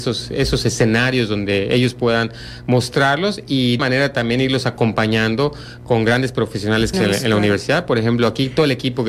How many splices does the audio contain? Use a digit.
2